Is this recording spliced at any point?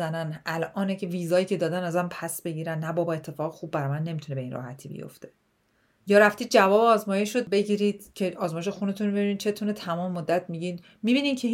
no; 0 cuts

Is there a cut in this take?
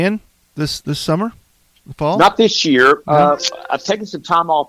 no; 0 cuts

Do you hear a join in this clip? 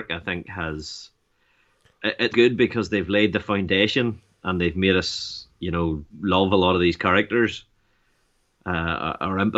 yes; 3 cuts; at 2.3 s, 5.5 s, 6.1 s

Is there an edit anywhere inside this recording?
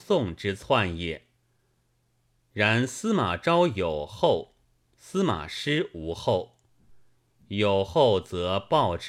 no; 0 cuts

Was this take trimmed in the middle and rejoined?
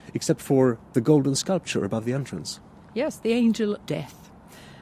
yes; 1 cut; at 3.8 s

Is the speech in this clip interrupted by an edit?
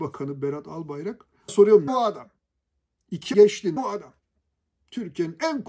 yes; 4 cuts; at 1.5 s, 1.9 s, 3.3 s, 3.8 s

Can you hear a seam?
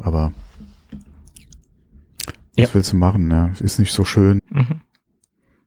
yes; 1 cut; at 4.4 s

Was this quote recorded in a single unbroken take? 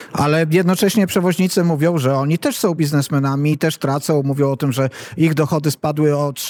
yes; 0 cuts

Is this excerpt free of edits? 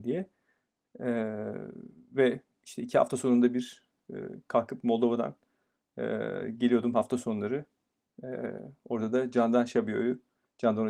yes; 0 cuts

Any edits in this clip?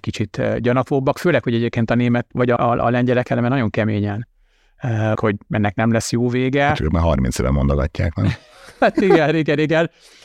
yes; 2 cuts; at 2.6 s, 5.1 s

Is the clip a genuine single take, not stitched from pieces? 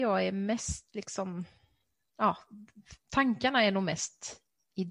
yes; 0 cuts

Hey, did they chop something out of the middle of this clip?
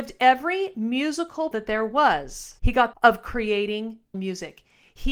yes; 4 cuts; at 1.5 s, 2.6 s, 2.9 s, 4.1 s

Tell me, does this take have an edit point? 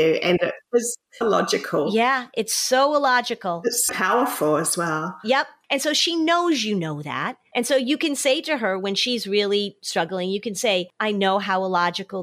yes; 2 cuts; at 1.2 s, 3.9 s

